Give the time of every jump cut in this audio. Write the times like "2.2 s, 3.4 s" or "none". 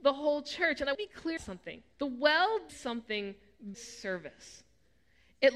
0.9 s, 1.4 s, 1.9 s, 2.7 s, 3.7 s

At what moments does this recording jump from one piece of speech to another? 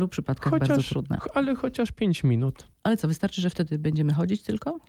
2.7 s

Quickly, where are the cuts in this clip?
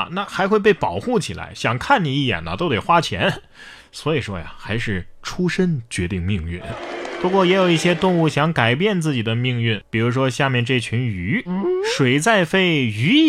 none

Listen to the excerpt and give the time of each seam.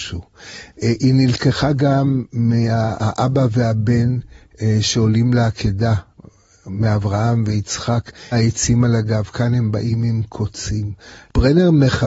8.3 s

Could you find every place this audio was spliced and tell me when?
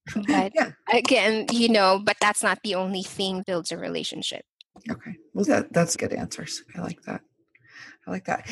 3.4 s, 4.7 s, 5.5 s, 5.9 s, 6.7 s

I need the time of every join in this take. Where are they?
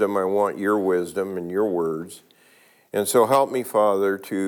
none

